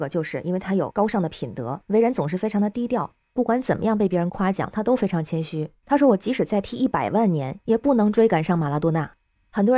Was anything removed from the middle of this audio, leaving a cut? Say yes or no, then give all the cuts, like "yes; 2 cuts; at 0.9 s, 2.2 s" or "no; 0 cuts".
no; 0 cuts